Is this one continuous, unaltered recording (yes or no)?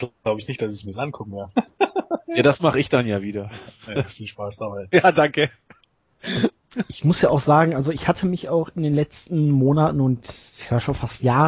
yes